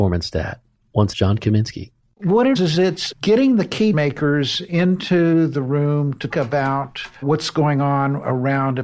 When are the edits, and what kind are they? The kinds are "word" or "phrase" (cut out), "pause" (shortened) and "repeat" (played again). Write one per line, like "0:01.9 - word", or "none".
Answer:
0:01.1 - word
0:02.6 - word
0:03.1 - word
0:03.9 - word
0:06.3 - word
0:07.2 - word